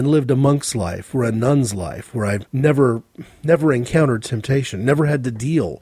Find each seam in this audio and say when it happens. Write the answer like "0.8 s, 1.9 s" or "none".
2.5 s